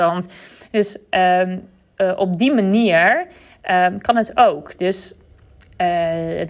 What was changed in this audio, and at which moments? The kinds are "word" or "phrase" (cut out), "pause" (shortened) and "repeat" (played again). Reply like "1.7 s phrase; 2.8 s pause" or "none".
none